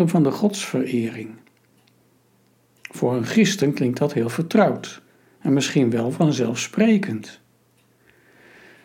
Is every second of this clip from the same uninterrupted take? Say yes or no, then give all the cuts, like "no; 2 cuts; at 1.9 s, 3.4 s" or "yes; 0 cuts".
yes; 0 cuts